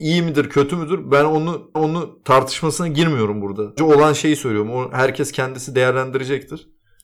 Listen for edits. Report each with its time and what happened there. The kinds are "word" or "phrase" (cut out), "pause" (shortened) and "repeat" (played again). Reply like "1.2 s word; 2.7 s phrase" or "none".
1.7 s repeat; 3.8 s word